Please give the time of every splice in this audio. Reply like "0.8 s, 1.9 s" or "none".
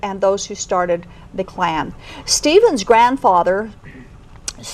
1.4 s